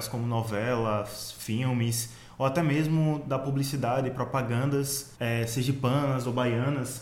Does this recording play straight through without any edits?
no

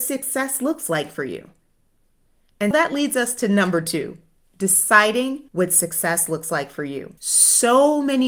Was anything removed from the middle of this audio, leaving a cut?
yes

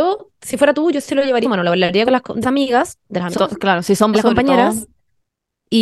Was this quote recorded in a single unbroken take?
no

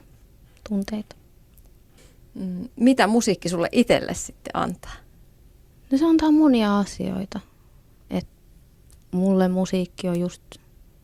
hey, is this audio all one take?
yes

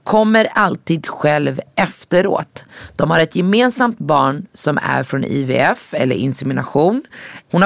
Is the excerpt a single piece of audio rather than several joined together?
yes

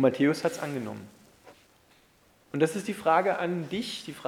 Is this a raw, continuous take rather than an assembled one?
yes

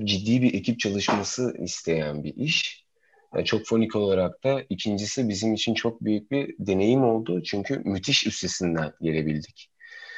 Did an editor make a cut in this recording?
no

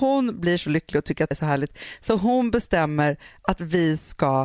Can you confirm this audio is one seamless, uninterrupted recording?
no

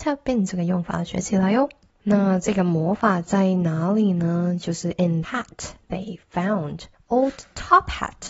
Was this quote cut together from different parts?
yes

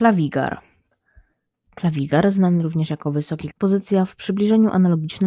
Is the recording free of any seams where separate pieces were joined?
no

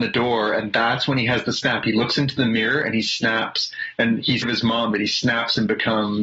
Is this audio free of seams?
no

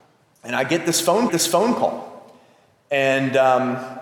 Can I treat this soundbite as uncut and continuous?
no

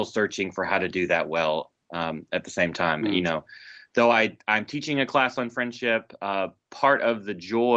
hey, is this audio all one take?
yes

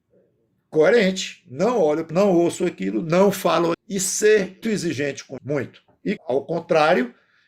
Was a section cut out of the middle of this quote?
yes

